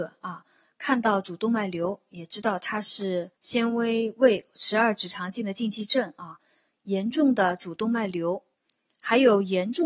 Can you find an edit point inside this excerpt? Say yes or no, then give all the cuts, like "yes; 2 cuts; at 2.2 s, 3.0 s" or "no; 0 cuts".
yes; 1 cut; at 3.4 s